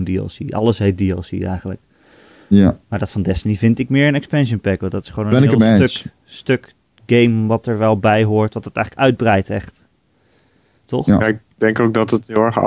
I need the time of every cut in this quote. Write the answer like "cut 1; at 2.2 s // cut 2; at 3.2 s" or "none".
none